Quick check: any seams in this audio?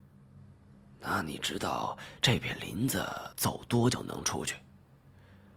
yes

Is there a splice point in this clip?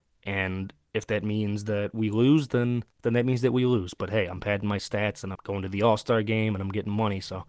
yes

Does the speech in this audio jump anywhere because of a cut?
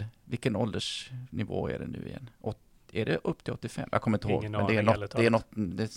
no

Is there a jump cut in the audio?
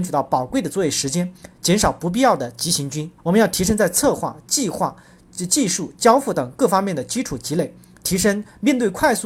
yes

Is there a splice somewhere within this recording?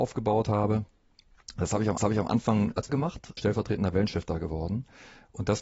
yes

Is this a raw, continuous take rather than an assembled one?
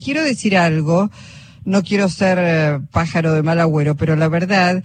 yes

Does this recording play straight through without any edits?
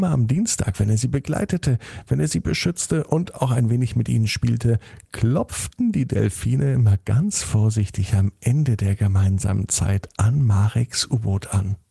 yes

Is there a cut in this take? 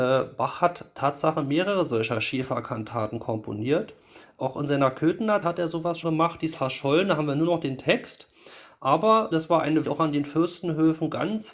yes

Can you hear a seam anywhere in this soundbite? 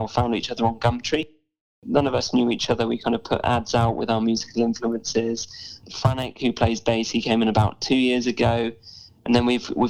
no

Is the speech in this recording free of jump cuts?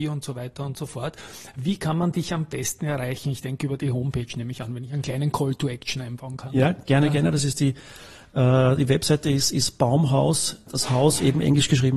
yes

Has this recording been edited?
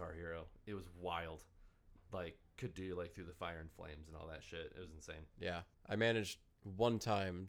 yes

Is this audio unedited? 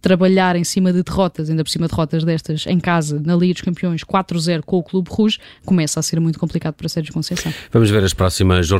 yes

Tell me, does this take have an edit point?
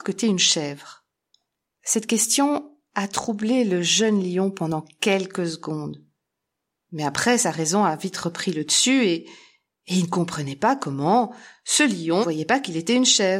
yes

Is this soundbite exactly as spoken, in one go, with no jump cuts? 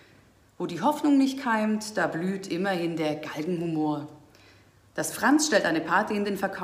yes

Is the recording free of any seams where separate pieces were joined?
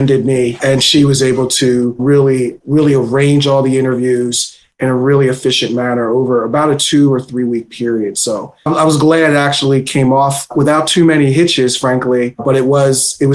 no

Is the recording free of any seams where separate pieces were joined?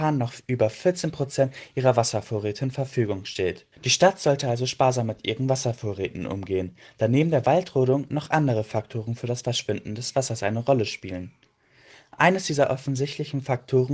no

